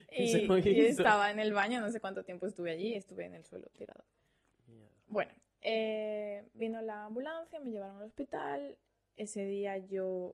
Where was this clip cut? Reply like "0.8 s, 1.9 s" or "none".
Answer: none